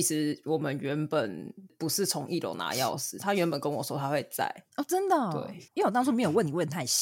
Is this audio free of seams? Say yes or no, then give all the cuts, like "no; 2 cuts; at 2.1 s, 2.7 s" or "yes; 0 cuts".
no; 2 cuts; at 4.7 s, 5.7 s